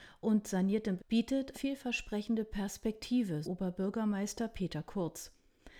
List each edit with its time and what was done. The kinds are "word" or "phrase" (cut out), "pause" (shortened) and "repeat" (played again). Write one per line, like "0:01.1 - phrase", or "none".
0:01.0 - word
0:01.5 - word
0:03.4 - word